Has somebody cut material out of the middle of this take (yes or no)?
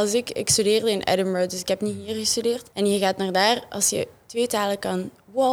yes